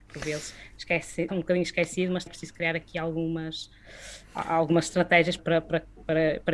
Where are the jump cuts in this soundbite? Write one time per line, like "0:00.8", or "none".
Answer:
0:01.3
0:02.3
0:05.4